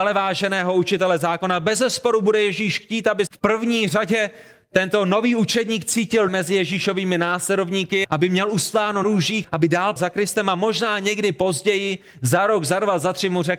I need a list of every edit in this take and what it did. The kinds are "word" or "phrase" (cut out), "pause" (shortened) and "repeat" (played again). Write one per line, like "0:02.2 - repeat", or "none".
0:03.3 - word
0:06.3 - word
0:08.0 - word
0:09.0 - word
0:09.4 - word
0:10.0 - word